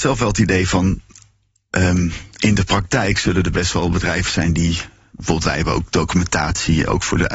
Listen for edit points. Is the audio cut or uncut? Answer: uncut